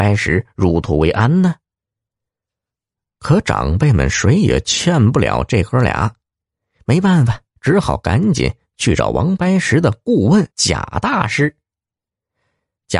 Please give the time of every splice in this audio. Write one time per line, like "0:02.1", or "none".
0:10.5